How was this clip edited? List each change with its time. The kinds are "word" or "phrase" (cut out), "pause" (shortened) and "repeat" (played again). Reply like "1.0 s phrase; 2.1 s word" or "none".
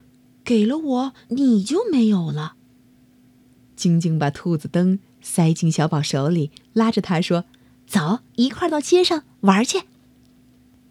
1.2 s pause; 2.8 s pause; 7.5 s pause; 8.3 s pause